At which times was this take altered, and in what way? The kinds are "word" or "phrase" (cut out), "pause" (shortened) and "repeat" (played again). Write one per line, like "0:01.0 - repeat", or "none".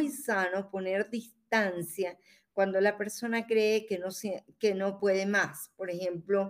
none